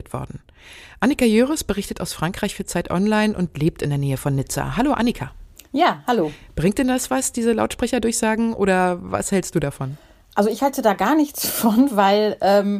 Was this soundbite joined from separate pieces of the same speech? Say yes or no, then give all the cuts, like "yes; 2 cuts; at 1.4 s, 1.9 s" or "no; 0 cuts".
no; 0 cuts